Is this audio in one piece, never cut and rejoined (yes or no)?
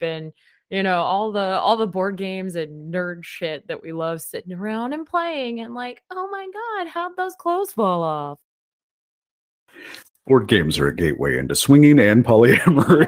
yes